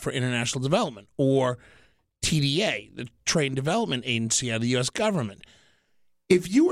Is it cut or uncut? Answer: uncut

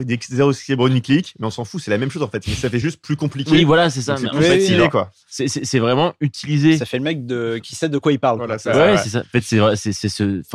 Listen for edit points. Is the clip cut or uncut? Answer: uncut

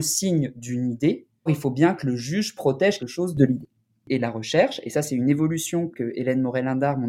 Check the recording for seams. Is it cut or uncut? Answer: cut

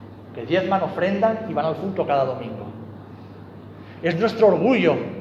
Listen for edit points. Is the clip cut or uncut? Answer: uncut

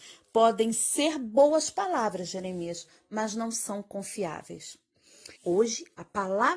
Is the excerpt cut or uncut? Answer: cut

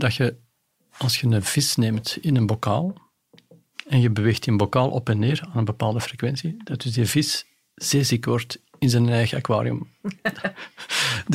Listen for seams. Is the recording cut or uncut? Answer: uncut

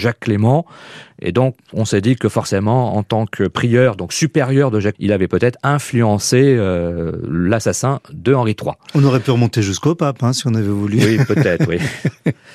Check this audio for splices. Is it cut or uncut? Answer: cut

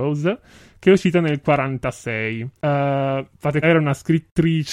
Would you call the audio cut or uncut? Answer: cut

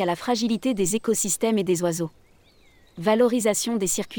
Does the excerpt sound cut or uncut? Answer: uncut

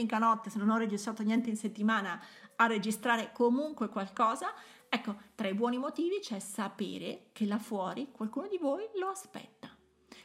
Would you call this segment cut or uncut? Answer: uncut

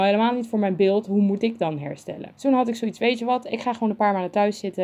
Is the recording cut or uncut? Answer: cut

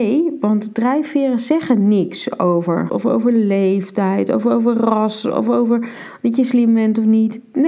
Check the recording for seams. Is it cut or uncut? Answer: cut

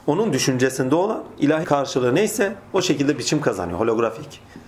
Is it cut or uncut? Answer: cut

